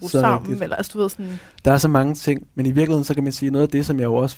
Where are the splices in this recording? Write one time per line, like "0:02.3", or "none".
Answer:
none